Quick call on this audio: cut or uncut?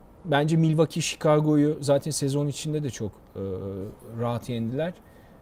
uncut